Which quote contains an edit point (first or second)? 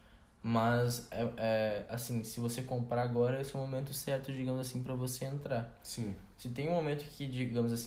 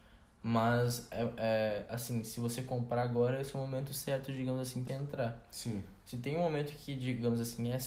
second